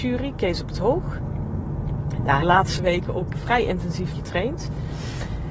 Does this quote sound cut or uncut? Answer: cut